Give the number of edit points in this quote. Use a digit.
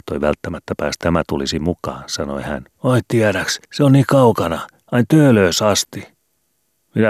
3